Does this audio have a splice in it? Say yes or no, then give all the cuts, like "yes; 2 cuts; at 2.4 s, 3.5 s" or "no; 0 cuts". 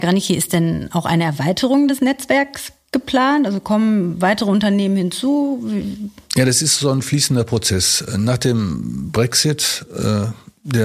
no; 0 cuts